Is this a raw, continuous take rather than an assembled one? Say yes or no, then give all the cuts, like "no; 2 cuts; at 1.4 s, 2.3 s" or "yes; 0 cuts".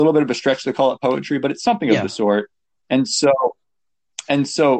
yes; 0 cuts